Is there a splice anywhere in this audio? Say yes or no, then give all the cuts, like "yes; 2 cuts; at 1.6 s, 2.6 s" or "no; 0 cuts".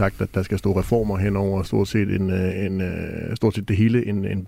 no; 0 cuts